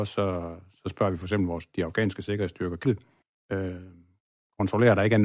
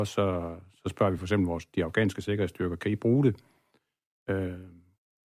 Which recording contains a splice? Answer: first; 2 cuts; at 2.8 s, 3.2 s

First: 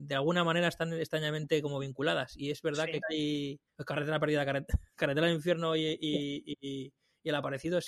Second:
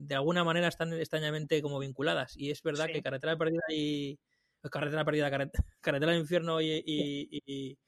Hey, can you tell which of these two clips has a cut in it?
first; 2 cuts; at 3.0 s, 3.7 s

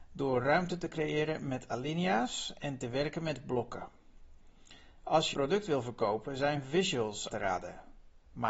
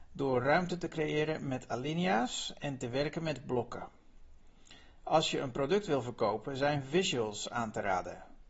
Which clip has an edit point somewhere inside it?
first; 2 cuts; at 5.3 s, 7.3 s

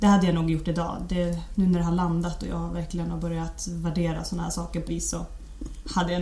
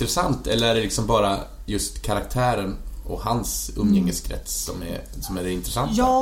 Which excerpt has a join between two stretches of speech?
first; 1 cut; at 4.9 s

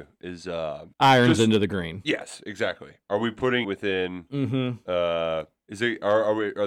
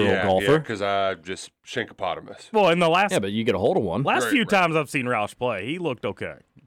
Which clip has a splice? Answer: first; 2 cuts; at 0.9 s, 3.6 s

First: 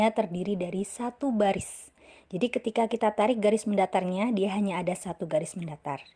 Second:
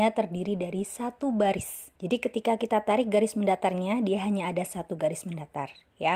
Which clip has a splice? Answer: second; 1 cut; at 1.9 s

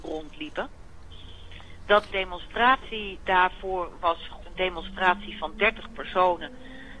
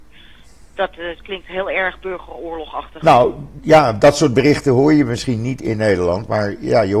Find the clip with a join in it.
first; 2 cuts; at 2.1 s, 4.4 s

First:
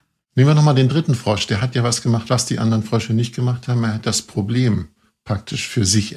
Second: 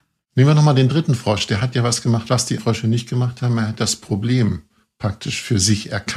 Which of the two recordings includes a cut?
second; 1 cut; at 2.6 s

